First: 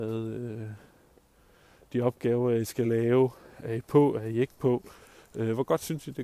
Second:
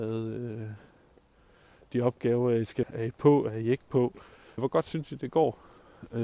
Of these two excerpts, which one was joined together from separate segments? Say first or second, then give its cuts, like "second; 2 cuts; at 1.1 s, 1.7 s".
second; 2 cuts; at 2.8 s, 4.6 s